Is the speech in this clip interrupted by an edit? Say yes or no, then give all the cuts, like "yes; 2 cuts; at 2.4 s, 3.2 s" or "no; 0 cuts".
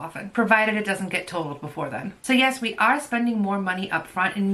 yes; 1 cut; at 2.2 s